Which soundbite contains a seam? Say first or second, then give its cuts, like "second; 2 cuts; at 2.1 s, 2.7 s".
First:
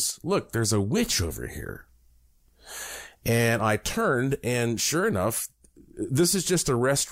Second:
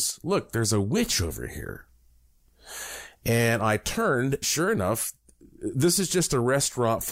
second; 1 cut; at 4.4 s